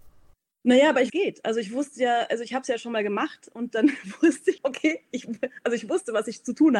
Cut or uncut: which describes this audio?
cut